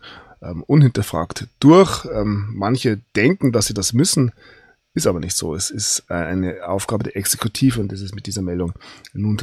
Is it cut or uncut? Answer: uncut